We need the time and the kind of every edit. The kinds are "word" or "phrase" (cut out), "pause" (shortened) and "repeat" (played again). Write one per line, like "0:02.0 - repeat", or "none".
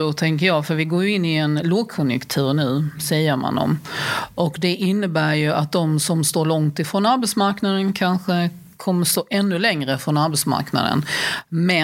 none